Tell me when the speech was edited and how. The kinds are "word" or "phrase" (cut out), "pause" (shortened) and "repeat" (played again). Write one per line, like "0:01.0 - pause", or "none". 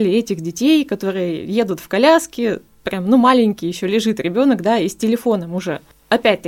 none